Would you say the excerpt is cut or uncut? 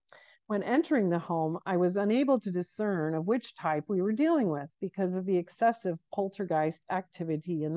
uncut